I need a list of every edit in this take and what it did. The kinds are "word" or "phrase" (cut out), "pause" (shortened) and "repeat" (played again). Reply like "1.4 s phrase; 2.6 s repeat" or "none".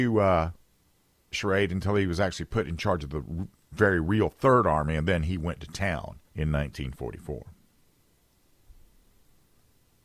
1.3 s phrase; 6.3 s pause